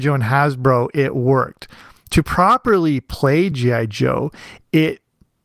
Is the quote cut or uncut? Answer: uncut